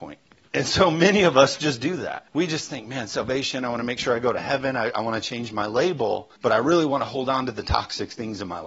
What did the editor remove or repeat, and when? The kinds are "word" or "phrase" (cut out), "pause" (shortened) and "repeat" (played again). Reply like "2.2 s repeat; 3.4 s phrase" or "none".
2.3 s pause; 6.4 s pause